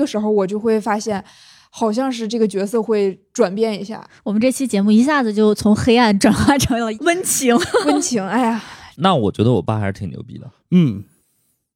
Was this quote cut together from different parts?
no; 0 cuts

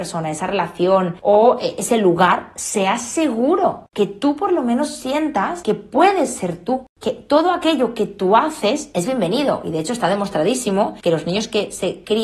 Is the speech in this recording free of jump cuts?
yes; 0 cuts

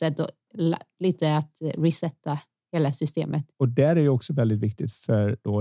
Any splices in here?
no; 0 cuts

